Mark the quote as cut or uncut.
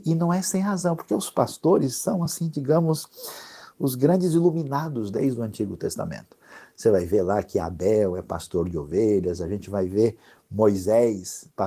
uncut